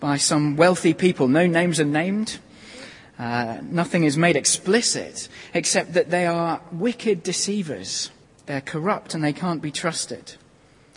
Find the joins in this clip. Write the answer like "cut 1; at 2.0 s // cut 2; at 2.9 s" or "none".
cut 1; at 8.2 s